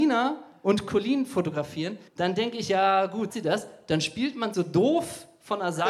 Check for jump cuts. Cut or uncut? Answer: cut